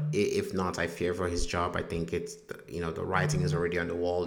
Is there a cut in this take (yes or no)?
no